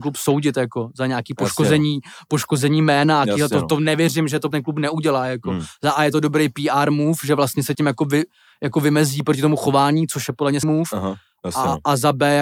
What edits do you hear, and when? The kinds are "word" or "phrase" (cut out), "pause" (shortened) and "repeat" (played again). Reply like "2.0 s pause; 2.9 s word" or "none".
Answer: 4.5 s word; 7.7 s word; 10.6 s word